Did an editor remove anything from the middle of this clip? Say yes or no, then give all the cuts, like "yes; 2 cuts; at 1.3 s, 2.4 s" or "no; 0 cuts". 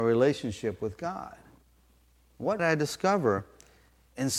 yes; 1 cut; at 2.6 s